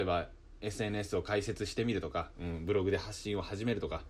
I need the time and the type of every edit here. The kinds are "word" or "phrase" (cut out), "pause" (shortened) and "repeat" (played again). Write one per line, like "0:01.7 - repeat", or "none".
none